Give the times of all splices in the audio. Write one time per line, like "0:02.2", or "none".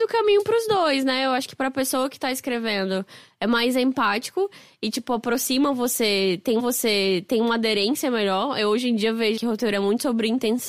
0:06.6
0:09.4

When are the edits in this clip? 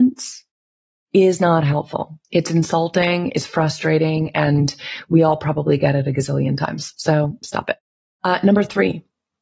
0:02.2

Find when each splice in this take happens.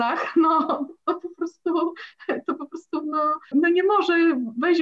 0:03.5

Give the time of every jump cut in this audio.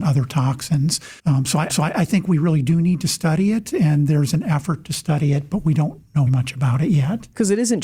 0:01.2
0:01.7
0:06.3

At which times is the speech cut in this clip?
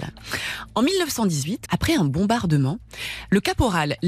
0:01.7

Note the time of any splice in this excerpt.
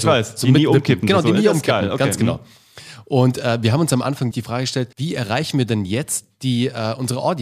0:04.3
0:04.9

